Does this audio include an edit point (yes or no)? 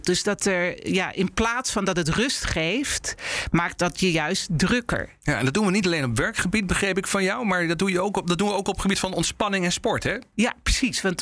no